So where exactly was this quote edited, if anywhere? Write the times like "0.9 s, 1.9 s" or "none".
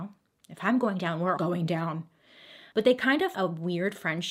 1.4 s, 3.3 s